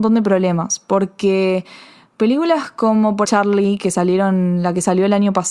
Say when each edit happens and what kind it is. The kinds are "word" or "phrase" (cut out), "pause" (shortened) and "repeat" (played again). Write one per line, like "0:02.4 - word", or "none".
0:03.2 - phrase